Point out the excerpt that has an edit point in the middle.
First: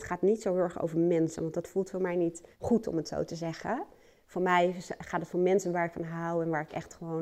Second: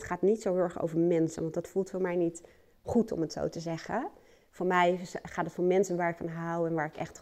first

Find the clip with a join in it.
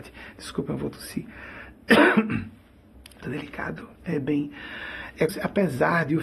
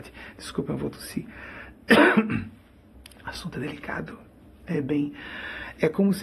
first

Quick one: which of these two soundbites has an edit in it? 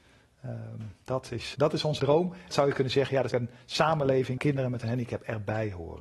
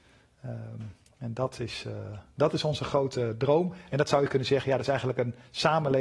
first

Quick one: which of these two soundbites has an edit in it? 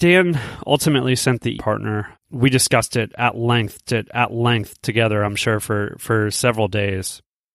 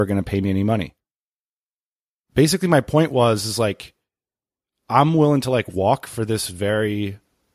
first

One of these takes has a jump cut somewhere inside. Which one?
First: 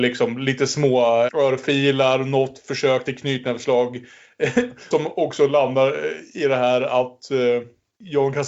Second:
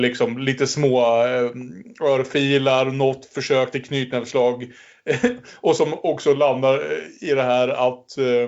first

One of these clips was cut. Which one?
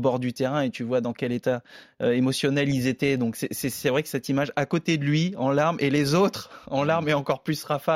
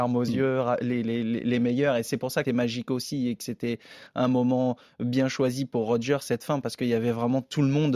second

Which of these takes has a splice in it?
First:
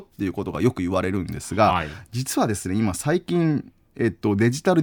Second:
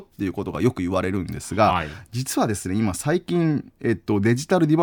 second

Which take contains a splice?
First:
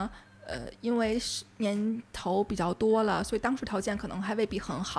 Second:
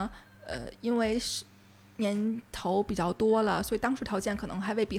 first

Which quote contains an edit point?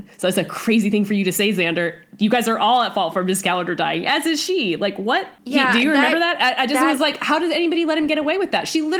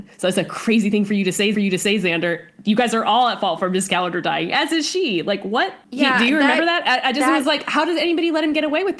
second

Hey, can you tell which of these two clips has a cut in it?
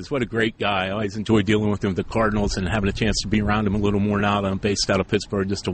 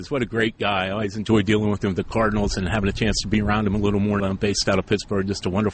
second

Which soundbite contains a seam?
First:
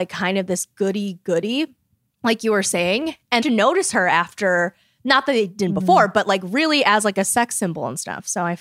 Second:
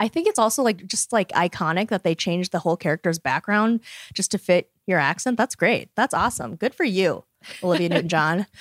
first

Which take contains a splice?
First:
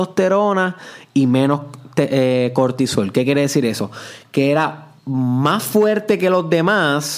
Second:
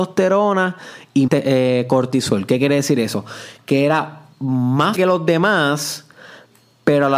second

